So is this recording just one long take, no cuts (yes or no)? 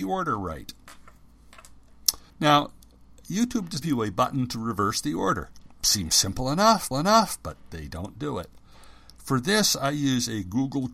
no